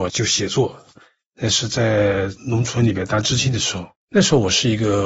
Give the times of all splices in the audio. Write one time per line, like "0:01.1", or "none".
0:03.9